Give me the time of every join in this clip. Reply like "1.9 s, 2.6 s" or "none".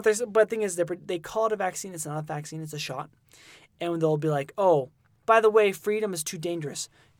none

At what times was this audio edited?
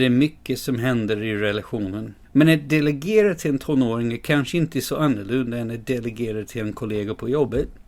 2.2 s

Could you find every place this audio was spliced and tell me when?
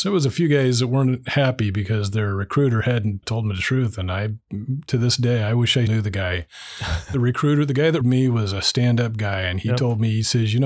3.2 s, 5.9 s, 8.0 s

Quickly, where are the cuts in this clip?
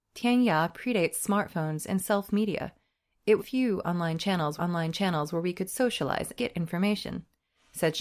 3.4 s, 4.6 s, 6.4 s

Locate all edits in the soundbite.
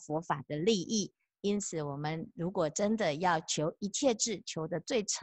none

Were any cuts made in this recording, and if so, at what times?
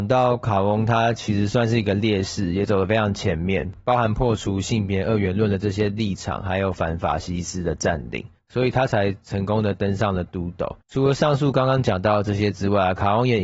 10.8 s

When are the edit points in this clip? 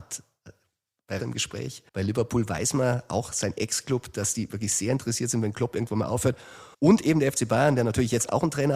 1.2 s, 1.9 s, 6.7 s

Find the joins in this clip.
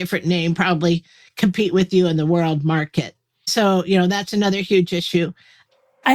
none

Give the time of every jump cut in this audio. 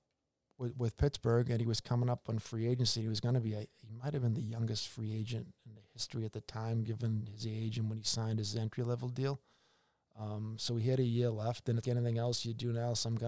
11.8 s

